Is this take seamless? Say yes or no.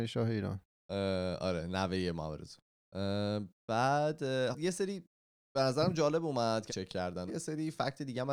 no